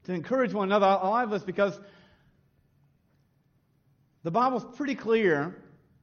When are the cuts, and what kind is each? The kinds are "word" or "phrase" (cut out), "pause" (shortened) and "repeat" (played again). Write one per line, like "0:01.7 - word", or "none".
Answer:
none

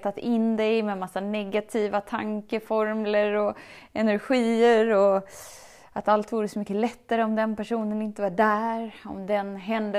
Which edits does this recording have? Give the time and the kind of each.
none

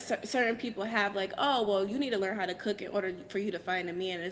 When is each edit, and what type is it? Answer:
none

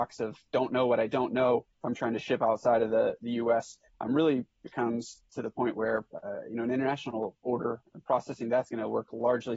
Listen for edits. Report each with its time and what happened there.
0:01.7 - pause

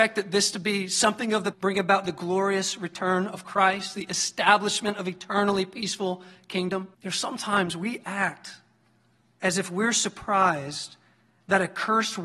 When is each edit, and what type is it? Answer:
0:01.5 - phrase
0:06.9 - pause

